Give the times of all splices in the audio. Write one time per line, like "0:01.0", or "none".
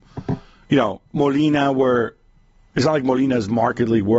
0:01.1